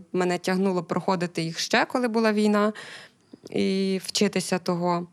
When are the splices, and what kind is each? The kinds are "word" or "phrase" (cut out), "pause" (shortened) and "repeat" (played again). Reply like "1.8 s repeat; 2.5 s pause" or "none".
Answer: none